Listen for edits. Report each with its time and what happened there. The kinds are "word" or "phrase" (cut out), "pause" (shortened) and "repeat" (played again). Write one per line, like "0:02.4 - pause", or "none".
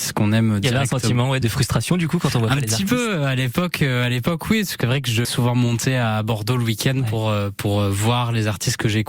0:01.4 - word
0:04.8 - word
0:05.2 - word